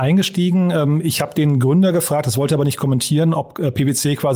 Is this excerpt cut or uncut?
uncut